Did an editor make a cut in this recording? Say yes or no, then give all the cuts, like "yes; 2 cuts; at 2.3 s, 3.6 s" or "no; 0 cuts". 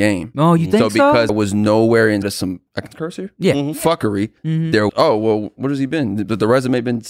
yes; 5 cuts; at 1.3 s, 2.2 s, 2.7 s, 4.4 s, 4.9 s